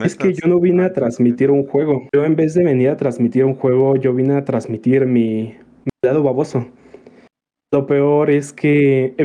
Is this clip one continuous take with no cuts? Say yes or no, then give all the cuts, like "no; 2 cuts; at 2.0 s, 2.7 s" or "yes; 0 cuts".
yes; 0 cuts